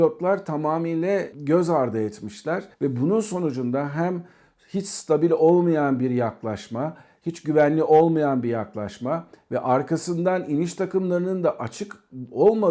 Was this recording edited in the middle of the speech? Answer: yes; 1 cut; at 2.7 s

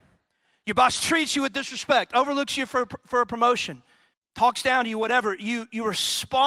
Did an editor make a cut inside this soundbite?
yes; 1 cut; at 4.1 s

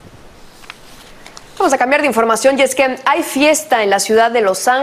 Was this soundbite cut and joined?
no; 0 cuts

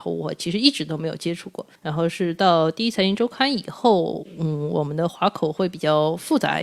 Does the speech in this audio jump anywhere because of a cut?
yes; 1 cut; at 1.8 s

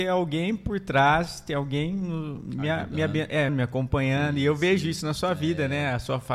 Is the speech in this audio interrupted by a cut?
yes; 1 cut; at 3.5 s

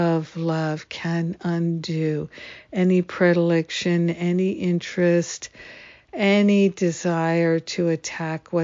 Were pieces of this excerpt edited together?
no; 0 cuts

